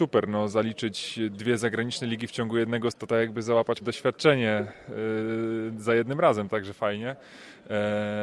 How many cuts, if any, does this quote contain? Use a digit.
3